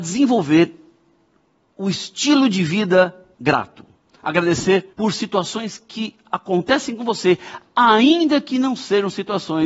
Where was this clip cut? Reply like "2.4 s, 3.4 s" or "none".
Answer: 3.3 s, 4.9 s